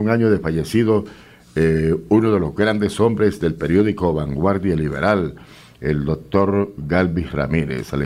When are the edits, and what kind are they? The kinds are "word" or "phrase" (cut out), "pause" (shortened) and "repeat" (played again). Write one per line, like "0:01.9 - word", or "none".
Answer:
none